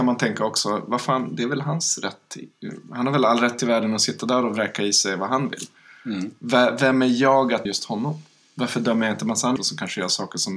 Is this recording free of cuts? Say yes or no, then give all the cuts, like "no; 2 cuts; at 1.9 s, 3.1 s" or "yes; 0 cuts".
no; 2 cuts; at 7.7 s, 9.6 s